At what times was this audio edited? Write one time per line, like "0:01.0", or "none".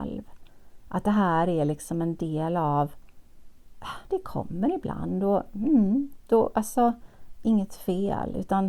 none